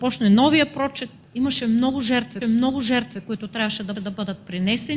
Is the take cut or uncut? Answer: cut